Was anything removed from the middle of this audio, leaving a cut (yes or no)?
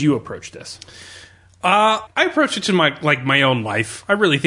yes